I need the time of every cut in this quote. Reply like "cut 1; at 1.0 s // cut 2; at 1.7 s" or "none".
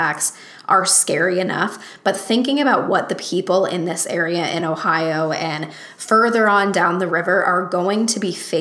none